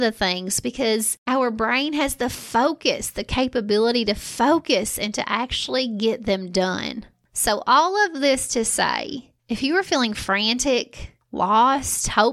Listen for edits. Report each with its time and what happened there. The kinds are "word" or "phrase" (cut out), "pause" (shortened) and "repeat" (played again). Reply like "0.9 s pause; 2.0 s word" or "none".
none